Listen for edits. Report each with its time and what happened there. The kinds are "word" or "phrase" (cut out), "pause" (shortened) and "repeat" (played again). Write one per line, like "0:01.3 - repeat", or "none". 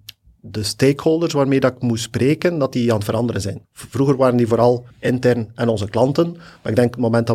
0:03.6 - pause
0:04.9 - pause